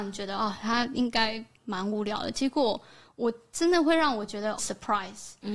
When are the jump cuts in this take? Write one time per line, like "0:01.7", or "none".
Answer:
0:04.6

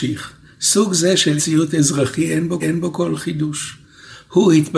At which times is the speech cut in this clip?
0:01.4
0:02.6

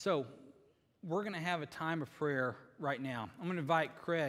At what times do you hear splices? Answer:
none

